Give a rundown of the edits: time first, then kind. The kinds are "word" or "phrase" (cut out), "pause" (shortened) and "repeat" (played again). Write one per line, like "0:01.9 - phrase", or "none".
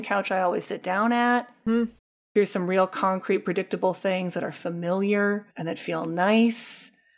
0:02.0 - pause
0:05.5 - pause